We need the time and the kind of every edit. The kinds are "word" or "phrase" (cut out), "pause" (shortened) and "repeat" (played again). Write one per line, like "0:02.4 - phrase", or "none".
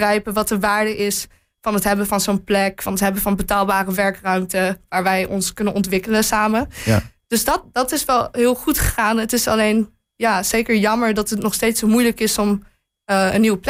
none